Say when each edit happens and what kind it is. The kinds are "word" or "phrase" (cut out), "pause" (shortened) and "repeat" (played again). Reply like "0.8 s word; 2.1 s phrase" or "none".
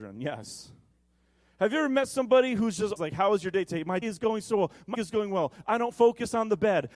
3.0 s word; 4.0 s word; 4.9 s word